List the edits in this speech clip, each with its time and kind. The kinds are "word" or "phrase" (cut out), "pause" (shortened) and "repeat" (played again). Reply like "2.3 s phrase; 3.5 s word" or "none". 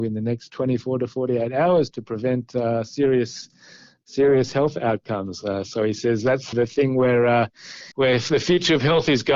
6.5 s phrase; 7.9 s pause

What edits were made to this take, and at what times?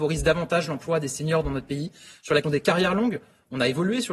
2.4 s word

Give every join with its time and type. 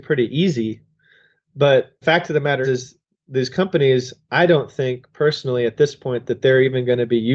2.0 s word; 2.6 s word

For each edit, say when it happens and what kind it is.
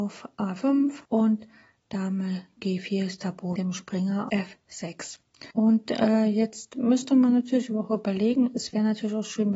1.0 s pause; 3.6 s word; 4.3 s word; 5.5 s pause

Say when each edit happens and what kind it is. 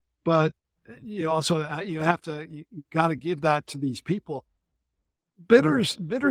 none

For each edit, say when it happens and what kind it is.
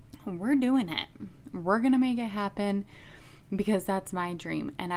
none

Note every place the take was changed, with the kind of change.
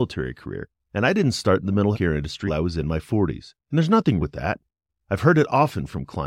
1.9 s word; 2.5 s word; 3.6 s pause; 4.2 s word

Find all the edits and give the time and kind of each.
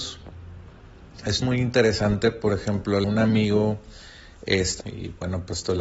1.4 s word; 3.0 s word; 4.8 s word

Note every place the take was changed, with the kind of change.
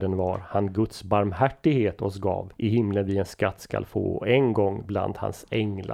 2.6 s pause

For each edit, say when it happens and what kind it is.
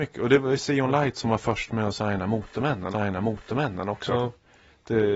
2.9 s repeat

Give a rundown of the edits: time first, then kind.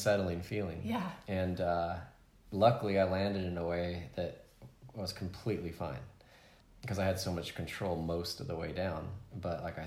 none

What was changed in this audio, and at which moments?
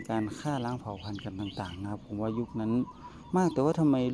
none

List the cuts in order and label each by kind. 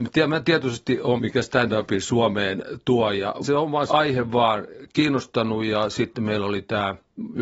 1.2 s word; 3.4 s word; 3.9 s word

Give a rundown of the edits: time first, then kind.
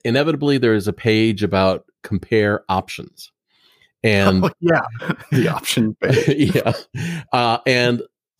none

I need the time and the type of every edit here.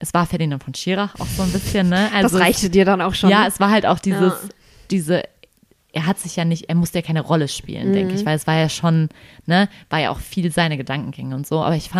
none

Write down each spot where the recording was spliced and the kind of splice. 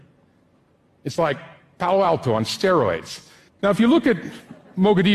none

